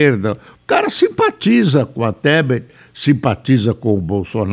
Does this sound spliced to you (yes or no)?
no